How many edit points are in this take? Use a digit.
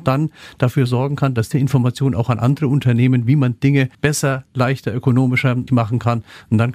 3